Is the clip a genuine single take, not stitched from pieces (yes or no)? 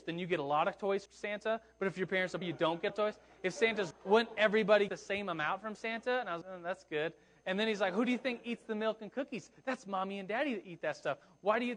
no